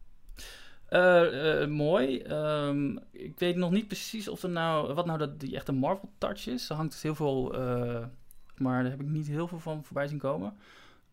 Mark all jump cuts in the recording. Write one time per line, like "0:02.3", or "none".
0:03.1
0:08.6